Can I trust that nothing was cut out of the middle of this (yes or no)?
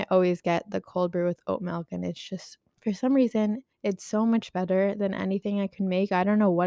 no